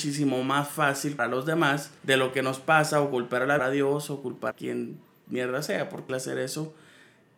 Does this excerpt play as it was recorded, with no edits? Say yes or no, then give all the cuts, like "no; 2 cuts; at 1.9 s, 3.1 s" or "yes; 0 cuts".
no; 5 cuts; at 1.2 s, 2.0 s, 3.6 s, 4.5 s, 6.1 s